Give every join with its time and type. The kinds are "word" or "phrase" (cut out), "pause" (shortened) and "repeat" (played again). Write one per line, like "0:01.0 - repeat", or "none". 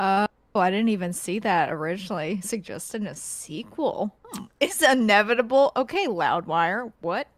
0:04.2 - pause